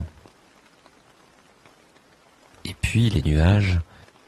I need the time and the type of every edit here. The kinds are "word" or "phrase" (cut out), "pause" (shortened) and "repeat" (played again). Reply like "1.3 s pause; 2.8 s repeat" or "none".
none